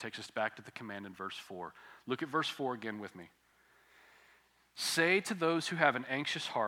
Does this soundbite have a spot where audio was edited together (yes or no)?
no